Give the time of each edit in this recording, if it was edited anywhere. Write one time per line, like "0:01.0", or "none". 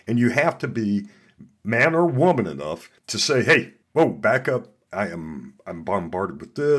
0:03.0
0:03.8